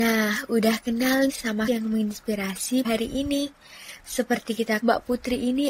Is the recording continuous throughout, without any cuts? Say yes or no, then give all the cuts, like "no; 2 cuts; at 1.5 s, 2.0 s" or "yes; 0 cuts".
no; 4 cuts; at 1.3 s, 1.7 s, 2.8 s, 4.8 s